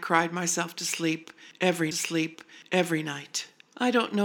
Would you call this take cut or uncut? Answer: cut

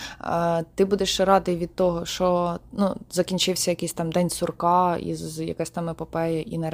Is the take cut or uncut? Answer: uncut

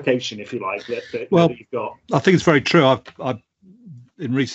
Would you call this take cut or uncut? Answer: cut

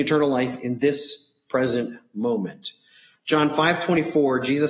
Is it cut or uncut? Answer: uncut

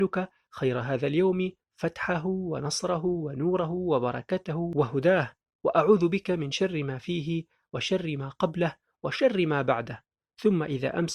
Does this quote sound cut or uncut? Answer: uncut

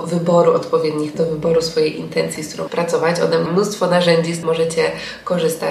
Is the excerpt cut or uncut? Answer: cut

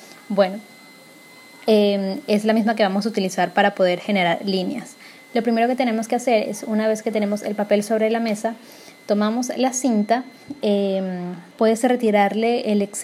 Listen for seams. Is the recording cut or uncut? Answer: cut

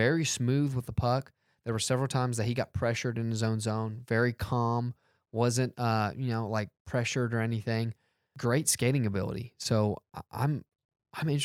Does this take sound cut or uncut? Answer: uncut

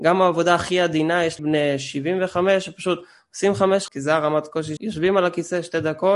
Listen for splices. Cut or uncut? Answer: cut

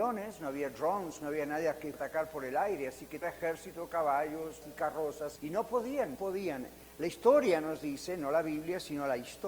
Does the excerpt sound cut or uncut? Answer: cut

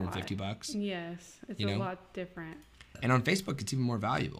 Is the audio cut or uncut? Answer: cut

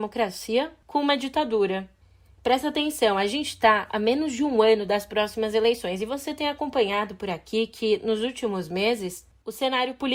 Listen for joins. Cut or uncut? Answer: uncut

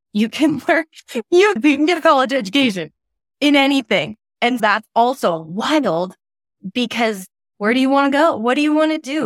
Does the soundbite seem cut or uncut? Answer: cut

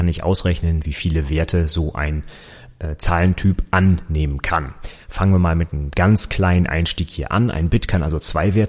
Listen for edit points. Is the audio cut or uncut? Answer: uncut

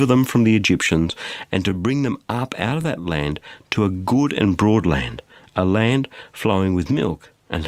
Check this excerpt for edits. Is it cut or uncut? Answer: uncut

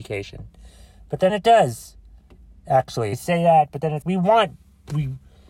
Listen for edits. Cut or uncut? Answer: cut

